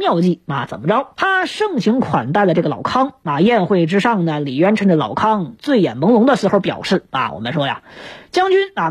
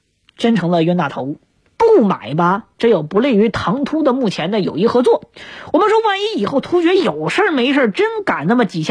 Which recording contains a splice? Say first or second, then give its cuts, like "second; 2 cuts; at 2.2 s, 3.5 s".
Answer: first; 1 cut; at 1.1 s